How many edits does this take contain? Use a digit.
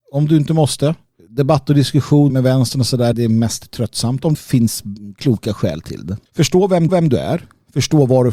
6